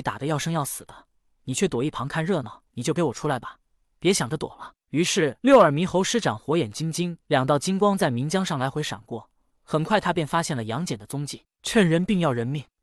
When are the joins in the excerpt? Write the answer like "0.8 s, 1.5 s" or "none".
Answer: 2.7 s, 5.4 s, 7.2 s